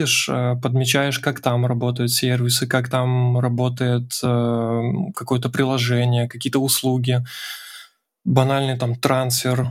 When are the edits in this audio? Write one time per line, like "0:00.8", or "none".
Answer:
none